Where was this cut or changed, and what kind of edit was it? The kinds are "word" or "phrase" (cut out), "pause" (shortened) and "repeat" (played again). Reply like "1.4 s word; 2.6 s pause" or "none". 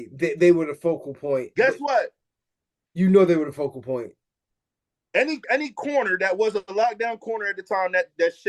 5.4 s word